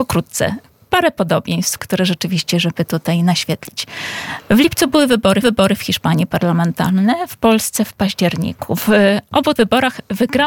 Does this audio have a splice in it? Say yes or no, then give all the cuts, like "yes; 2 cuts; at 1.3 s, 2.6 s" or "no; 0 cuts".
yes; 3 cuts; at 1.8 s, 5.4 s, 9.6 s